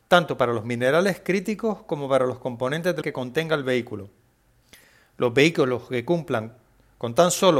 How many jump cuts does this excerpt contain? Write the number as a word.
one